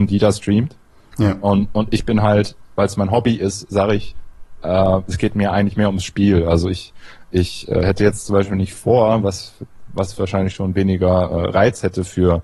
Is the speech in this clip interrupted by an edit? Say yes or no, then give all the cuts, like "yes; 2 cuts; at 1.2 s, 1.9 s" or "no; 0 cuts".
no; 0 cuts